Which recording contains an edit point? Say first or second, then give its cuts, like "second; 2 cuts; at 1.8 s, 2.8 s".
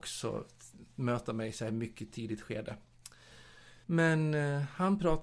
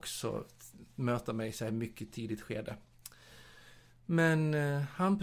first; 1 cut; at 3.8 s